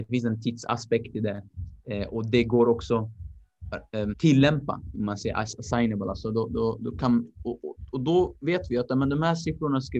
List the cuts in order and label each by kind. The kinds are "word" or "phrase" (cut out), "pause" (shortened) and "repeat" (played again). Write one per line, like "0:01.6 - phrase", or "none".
0:04.1 - word